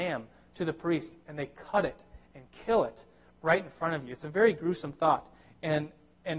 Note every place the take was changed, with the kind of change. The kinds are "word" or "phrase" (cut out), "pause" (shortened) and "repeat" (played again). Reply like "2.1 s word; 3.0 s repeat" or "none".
none